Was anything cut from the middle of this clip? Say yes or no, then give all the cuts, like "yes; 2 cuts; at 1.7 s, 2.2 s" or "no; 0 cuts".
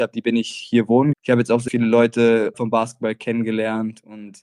yes; 3 cuts; at 1.1 s, 1.7 s, 2.5 s